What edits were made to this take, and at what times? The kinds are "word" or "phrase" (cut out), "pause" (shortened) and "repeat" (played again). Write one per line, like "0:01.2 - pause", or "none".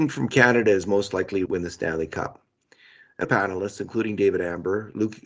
0:01.5 - word
0:03.2 - phrase

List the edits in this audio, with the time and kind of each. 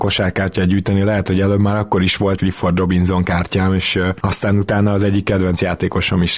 0:02.4 - word

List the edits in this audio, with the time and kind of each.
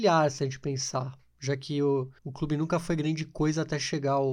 0:02.2 - pause

